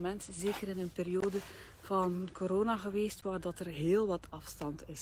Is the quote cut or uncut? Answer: uncut